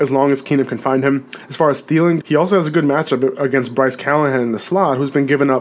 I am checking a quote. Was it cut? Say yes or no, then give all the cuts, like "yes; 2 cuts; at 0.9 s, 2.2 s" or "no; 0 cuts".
yes; 1 cut; at 2.2 s